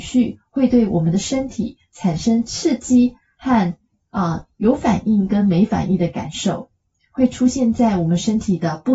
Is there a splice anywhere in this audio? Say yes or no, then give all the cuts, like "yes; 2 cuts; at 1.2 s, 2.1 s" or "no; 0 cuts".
no; 0 cuts